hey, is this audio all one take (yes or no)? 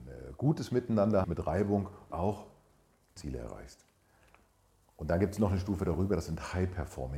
no